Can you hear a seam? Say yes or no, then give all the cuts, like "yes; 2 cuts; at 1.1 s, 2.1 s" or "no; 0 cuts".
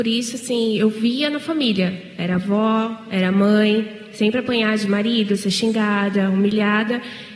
no; 0 cuts